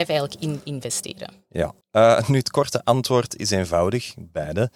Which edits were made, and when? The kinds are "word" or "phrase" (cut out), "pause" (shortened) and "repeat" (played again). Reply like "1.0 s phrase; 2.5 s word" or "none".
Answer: 1.8 s pause